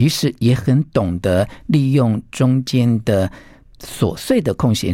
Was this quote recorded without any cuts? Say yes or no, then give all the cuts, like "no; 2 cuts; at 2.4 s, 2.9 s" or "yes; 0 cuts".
yes; 0 cuts